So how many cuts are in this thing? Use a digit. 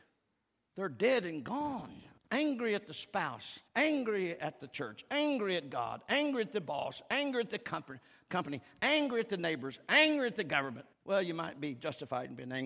3